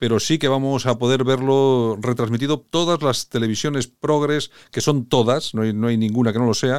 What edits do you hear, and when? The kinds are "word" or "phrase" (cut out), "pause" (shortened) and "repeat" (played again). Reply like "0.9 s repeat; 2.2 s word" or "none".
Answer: 2.6 s word